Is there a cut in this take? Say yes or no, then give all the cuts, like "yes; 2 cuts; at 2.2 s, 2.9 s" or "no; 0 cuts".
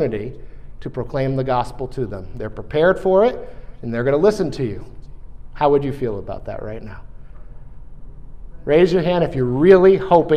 no; 0 cuts